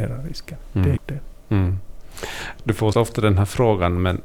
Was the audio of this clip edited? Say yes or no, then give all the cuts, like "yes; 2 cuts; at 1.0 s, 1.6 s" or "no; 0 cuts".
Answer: yes; 2 cuts; at 1.0 s, 2.9 s